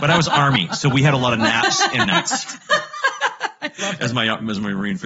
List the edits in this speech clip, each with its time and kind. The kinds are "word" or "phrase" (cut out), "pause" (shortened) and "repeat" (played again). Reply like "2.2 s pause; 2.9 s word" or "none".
2.0 s word

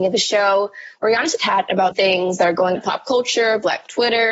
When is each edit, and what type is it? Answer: 1.4 s word; 1.9 s word; 2.8 s word

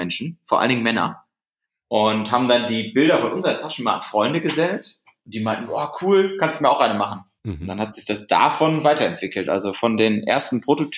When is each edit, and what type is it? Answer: none

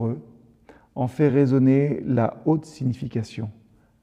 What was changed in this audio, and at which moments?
none

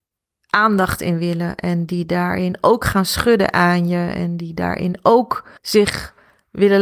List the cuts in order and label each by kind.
5.6 s pause

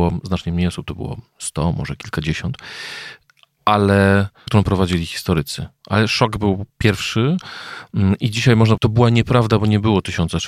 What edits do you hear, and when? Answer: 4.5 s phrase; 6.7 s pause; 8.8 s word

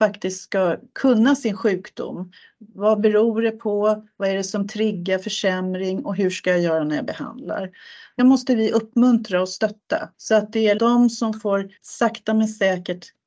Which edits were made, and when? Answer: 8.2 s word; 10.1 s pause; 10.8 s word; 11.8 s pause

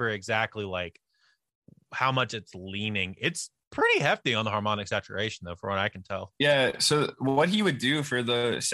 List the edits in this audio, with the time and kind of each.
none

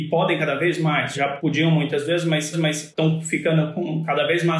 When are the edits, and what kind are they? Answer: 2.5 s repeat

